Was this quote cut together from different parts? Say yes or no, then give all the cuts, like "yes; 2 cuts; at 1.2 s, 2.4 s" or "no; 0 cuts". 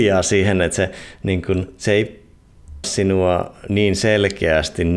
yes; 1 cut; at 2.8 s